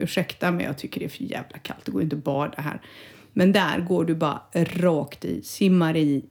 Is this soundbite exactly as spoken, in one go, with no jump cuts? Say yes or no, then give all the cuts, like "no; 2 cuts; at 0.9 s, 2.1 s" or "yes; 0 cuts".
yes; 0 cuts